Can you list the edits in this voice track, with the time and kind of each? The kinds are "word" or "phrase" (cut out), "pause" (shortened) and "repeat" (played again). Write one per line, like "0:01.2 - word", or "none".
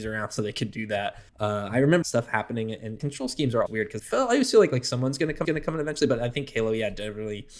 0:01.3 - pause
0:02.0 - phrase
0:03.0 - phrase
0:03.7 - word
0:04.0 - word
0:05.4 - repeat